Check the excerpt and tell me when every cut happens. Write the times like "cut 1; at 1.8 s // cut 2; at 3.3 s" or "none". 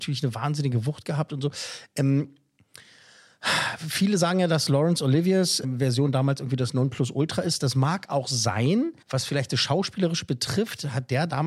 cut 1; at 5.6 s // cut 2; at 9.0 s

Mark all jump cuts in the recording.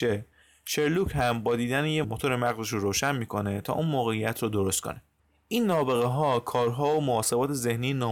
cut 1; at 2.0 s

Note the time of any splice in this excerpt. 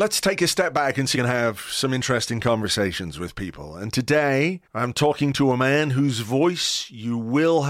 cut 1; at 1.1 s // cut 2; at 4.7 s

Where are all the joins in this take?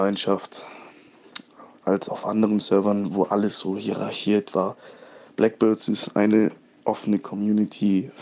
none

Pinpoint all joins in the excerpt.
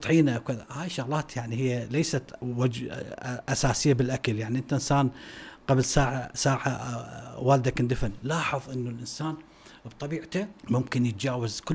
cut 1; at 10.6 s

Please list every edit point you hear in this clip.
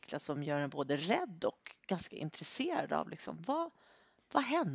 none

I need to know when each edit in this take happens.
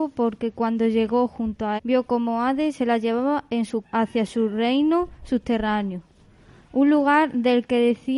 cut 1; at 1.8 s // cut 2; at 3.8 s

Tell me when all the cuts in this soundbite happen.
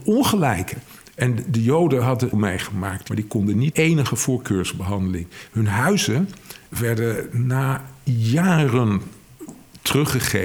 cut 1; at 2.3 s // cut 2; at 3.1 s // cut 3; at 3.7 s // cut 4; at 6.7 s

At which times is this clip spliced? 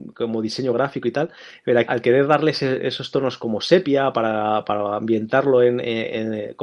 cut 1; at 1.9 s

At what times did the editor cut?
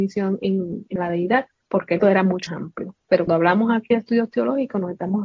cut 1; at 1.0 s // cut 2; at 1.6 s // cut 3; at 2.0 s // cut 4; at 2.5 s // cut 5; at 3.3 s

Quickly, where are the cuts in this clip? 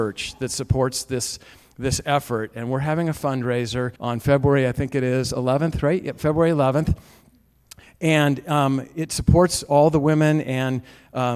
cut 1; at 4.0 s

